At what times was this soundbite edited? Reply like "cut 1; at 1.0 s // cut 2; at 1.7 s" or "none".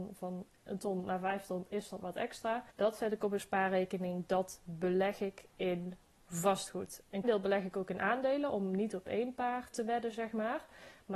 cut 1; at 2.0 s // cut 2; at 2.7 s // cut 3; at 7.2 s // cut 4; at 9.7 s